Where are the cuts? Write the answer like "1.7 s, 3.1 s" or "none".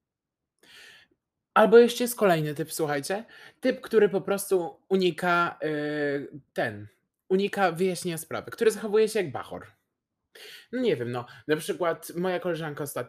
6.5 s